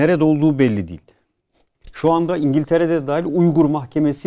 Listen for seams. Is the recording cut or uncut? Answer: uncut